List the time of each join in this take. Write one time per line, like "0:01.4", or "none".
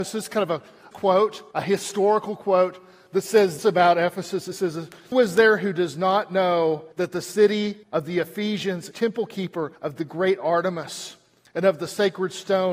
0:00.9
0:01.5
0:03.6
0:05.1
0:06.9
0:07.8
0:08.9
0:09.8